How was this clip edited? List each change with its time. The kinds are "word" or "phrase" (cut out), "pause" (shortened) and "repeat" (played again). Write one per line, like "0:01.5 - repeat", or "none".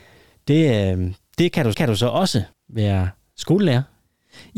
0:01.7 - repeat
0:02.5 - pause